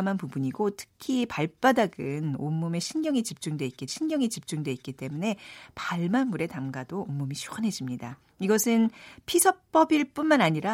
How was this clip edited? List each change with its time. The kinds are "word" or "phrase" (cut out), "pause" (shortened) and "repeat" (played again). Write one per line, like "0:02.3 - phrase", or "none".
0:03.9 - repeat